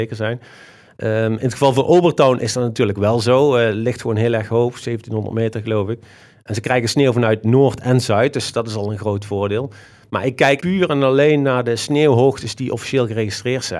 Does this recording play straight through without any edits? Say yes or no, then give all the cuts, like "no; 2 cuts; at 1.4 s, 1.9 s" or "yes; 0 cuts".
no; 1 cut; at 10.6 s